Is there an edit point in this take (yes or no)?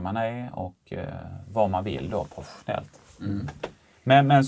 no